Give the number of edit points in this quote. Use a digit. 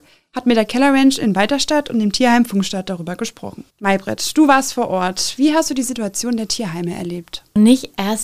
1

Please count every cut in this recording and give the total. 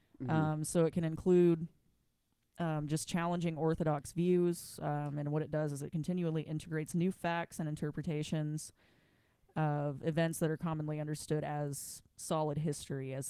0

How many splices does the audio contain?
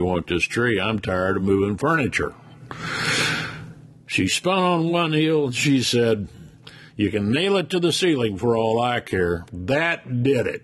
0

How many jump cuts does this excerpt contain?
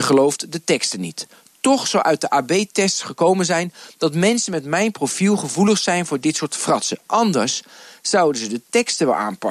0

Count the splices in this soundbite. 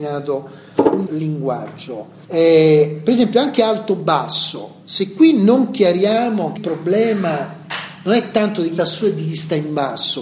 4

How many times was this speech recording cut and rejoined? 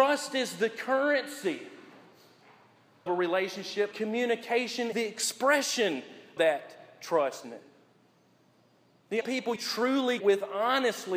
8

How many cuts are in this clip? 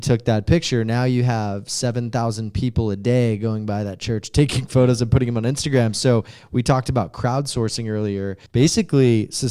1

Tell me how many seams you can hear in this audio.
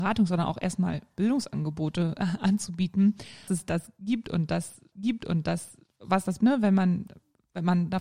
3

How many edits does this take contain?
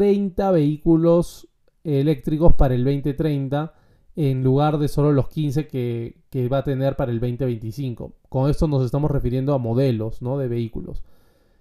0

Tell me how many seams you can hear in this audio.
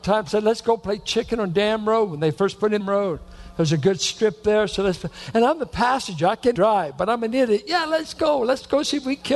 2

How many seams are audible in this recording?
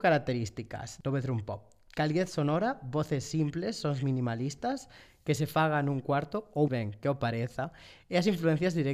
1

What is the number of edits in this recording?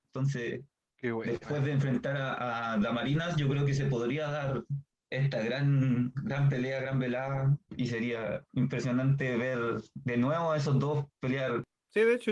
0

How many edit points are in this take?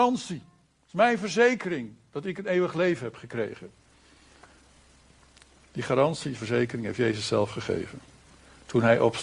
0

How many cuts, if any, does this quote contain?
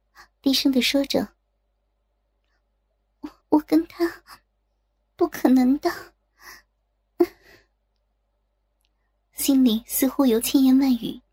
1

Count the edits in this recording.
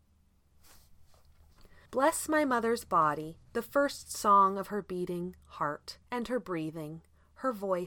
3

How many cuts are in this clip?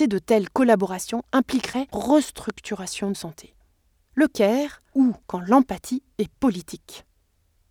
2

